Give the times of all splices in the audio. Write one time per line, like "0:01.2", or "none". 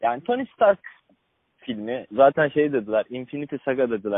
none